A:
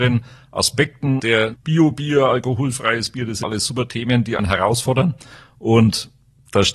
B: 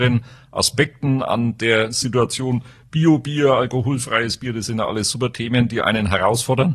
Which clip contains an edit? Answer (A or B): A